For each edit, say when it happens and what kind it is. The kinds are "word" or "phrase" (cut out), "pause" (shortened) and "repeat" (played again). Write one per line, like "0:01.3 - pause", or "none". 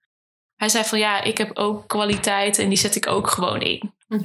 none